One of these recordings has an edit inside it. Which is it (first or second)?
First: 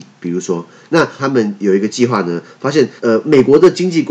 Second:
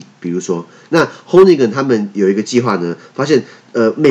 first